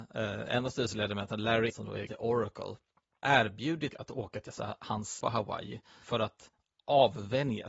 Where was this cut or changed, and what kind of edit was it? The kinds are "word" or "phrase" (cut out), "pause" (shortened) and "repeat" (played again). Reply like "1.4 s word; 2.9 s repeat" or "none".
1.7 s word; 2.1 s word; 3.2 s word; 3.9 s word; 4.5 s word; 5.2 s word; 6.0 s word